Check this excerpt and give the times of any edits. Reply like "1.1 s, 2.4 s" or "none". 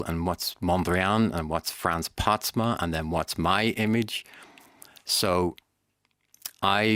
none

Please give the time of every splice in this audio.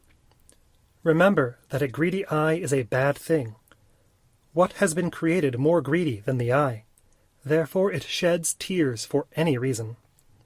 none

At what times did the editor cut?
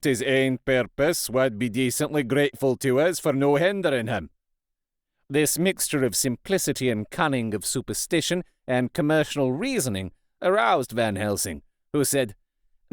none

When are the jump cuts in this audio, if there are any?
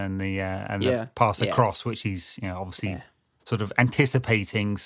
none

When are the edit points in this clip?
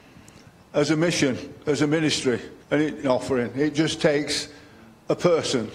2.6 s, 3.0 s

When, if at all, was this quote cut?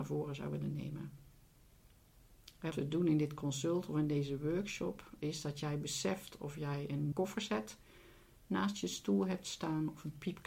2.7 s, 7.1 s

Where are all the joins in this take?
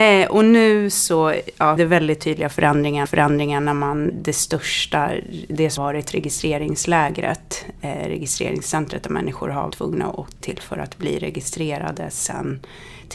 1.8 s, 3.1 s, 4.1 s, 5.8 s, 9.7 s, 10.4 s

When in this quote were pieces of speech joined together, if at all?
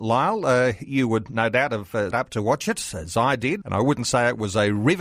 2.1 s, 3.6 s

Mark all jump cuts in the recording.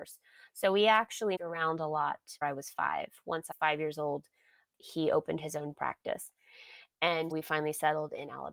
1.4 s, 2.4 s, 3.5 s, 5.7 s, 7.3 s

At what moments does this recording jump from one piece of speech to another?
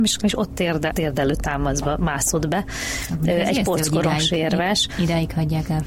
0.9 s

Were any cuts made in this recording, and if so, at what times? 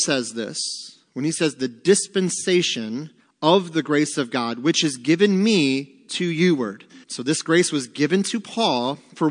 3.2 s, 7.0 s

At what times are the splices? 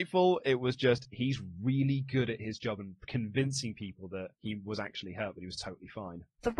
4.3 s

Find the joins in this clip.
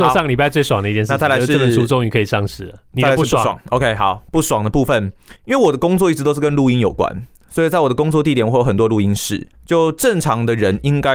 5.4 s, 9.5 s

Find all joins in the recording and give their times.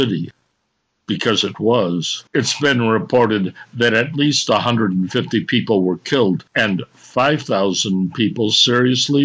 2.3 s, 6.5 s

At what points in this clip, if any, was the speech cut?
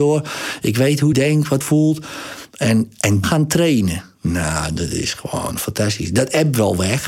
1.1 s, 1.6 s, 3.2 s

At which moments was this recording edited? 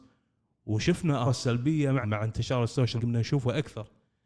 1.3 s, 2.0 s, 3.0 s

